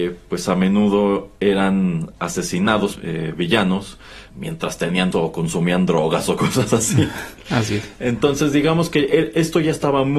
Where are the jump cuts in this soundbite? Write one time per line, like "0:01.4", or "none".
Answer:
0:01.4
0:03.0
0:04.3
0:05.1